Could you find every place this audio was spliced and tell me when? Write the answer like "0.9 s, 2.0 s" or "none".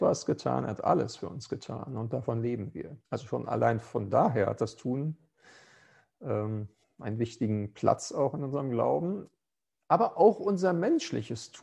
3.0 s, 6.8 s